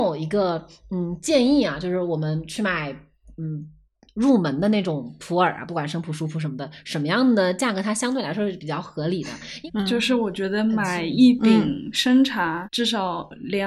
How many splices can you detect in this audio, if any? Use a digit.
1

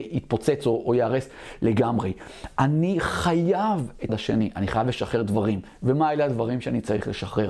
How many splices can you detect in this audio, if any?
1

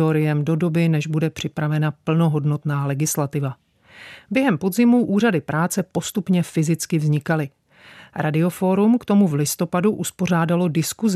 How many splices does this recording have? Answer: 0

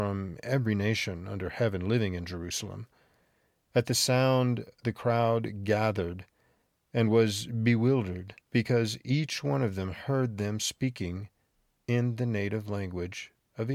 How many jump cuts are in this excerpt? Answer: 1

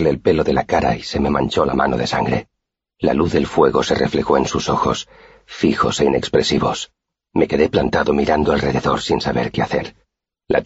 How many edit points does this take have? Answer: 0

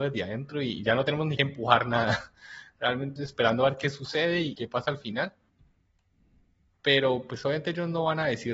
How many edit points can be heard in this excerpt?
3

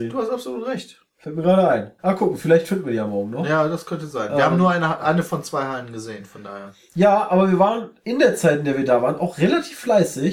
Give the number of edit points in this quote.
2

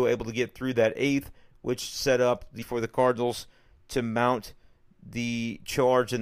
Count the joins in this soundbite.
1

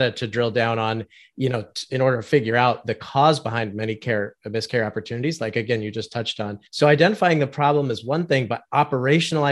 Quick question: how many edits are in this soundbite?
1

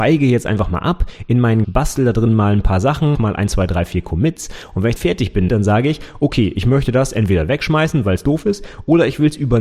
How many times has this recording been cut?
4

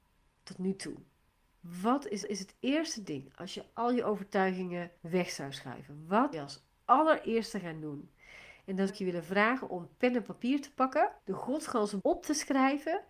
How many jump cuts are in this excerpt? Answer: 6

